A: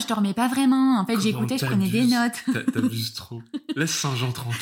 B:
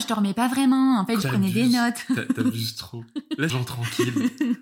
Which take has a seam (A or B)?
B